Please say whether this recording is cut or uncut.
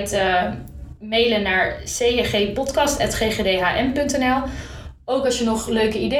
uncut